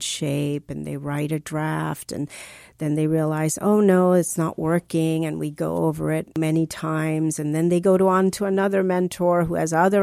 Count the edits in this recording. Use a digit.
0